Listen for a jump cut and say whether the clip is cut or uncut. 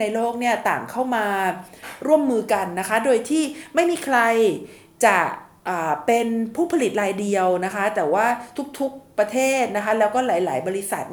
uncut